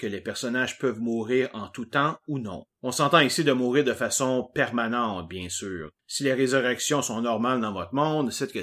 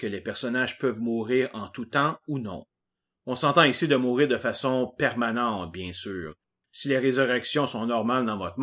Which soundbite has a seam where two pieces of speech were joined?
first; 2 cuts; at 2.7 s, 6.0 s

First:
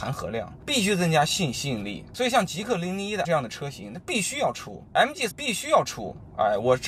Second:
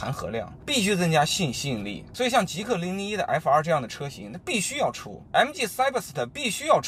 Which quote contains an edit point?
first; 2 cuts; at 3.2 s, 5.3 s

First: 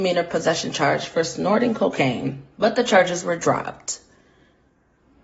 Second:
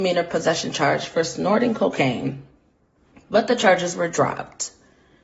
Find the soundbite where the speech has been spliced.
first; 1 cut; at 2.5 s

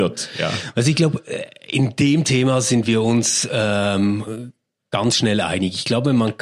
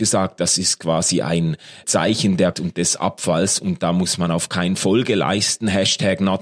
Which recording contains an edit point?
second; 3 cuts; at 1.8 s, 2.5 s, 4.8 s

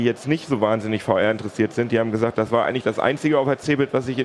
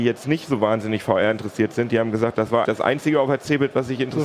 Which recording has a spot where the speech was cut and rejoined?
second; 1 cut; at 2.6 s

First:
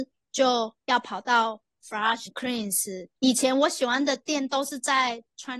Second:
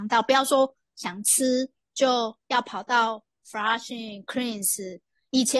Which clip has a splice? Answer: first; 2 cuts; at 2.3 s, 3.2 s

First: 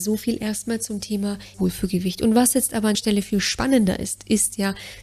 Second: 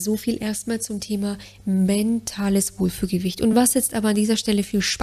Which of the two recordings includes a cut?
first; 2 cuts; at 1.5 s, 2.9 s

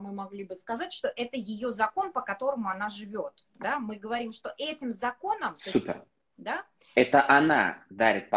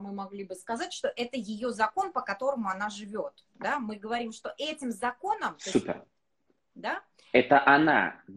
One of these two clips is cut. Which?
first; 1 cut; at 6.2 s

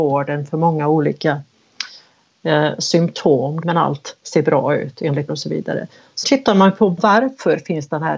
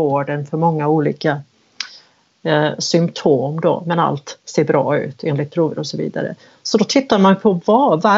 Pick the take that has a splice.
first; 4 cuts; at 3.6 s, 5.3 s, 6.2 s, 7.0 s

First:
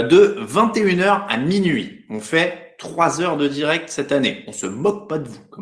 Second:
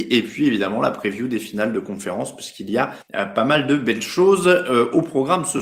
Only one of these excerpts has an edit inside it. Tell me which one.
second; 1 cut; at 3.0 s

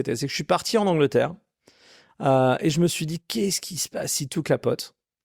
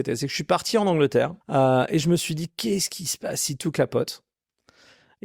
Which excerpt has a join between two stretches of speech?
second; 1 cut; at 1.4 s

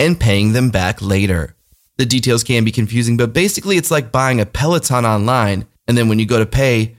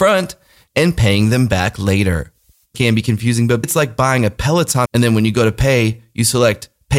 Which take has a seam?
second; 3 cuts; at 2.7 s, 3.6 s, 4.9 s

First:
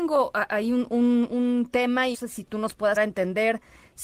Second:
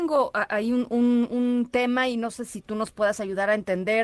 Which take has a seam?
first; 2 cuts; at 2.1 s, 3.0 s

